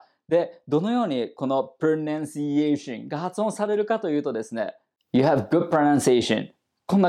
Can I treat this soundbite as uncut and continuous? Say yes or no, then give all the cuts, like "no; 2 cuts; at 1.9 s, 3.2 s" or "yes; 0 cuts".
yes; 0 cuts